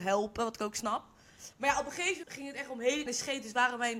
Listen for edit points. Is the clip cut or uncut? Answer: cut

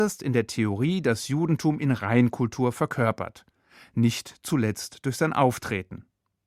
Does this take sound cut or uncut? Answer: uncut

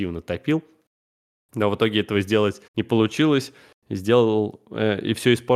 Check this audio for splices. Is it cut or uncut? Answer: cut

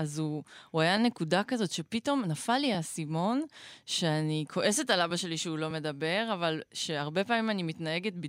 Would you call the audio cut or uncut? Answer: uncut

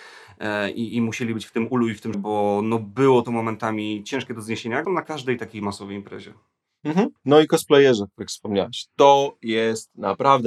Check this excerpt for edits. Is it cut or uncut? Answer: cut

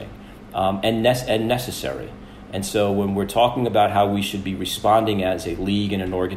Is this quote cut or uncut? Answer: uncut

